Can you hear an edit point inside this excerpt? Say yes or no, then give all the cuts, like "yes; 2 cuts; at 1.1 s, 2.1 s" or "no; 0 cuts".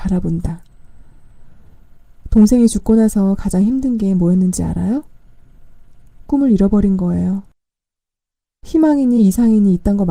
no; 0 cuts